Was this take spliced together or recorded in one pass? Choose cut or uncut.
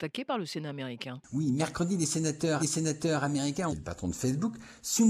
cut